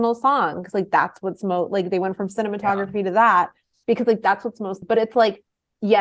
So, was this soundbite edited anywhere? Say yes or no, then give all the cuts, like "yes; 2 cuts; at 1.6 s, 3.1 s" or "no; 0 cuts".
yes; 1 cut; at 4.8 s